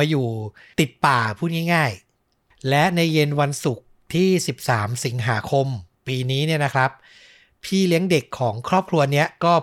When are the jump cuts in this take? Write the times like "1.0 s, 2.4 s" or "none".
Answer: none